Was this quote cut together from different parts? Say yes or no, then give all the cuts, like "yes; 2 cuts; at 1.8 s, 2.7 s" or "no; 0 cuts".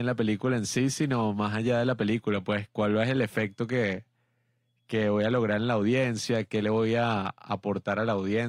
no; 0 cuts